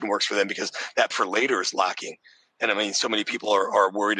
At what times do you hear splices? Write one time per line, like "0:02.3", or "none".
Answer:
0:01.1